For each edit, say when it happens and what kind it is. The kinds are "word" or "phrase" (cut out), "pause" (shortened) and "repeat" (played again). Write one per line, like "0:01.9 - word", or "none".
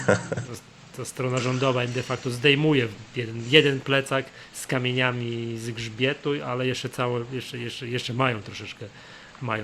none